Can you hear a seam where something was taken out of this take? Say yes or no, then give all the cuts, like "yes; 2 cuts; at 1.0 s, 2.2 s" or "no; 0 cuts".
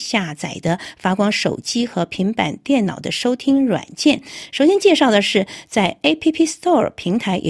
no; 0 cuts